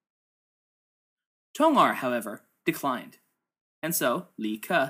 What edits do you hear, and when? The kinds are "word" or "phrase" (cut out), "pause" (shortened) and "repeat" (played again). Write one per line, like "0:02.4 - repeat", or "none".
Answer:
none